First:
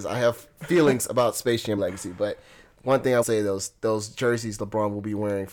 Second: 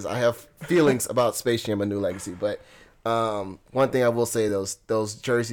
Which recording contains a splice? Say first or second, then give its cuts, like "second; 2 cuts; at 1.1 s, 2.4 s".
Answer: first; 3 cuts; at 1.8 s, 2.7 s, 3.2 s